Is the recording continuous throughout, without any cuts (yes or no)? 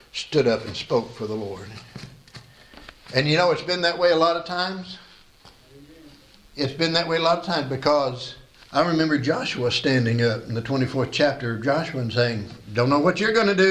yes